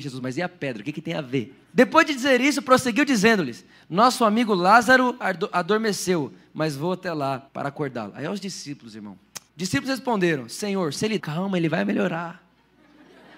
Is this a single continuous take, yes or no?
no